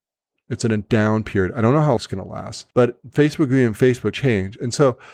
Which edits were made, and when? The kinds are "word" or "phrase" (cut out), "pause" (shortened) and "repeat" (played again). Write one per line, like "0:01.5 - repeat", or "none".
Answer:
0:02.0 - word
0:02.7 - pause
0:04.1 - phrase